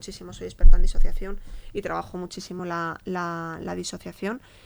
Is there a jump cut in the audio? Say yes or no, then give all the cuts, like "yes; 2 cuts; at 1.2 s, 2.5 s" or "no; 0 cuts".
no; 0 cuts